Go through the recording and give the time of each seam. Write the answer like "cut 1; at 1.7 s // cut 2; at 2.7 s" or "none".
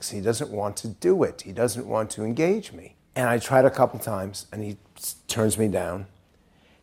cut 1; at 3.1 s